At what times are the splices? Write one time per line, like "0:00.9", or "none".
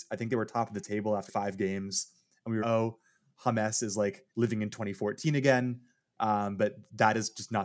0:01.3
0:02.6
0:04.3